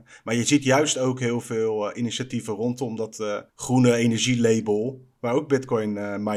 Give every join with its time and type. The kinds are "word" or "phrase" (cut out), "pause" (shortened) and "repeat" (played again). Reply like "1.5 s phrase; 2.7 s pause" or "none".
3.5 s pause